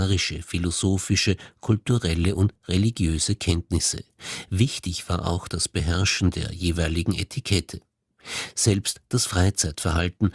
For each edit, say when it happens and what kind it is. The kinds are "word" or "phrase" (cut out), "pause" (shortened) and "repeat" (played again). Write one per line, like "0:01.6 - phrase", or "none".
none